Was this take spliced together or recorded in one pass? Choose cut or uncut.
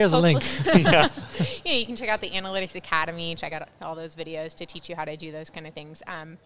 uncut